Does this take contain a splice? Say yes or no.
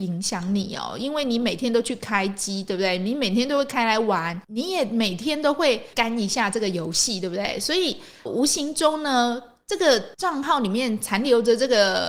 yes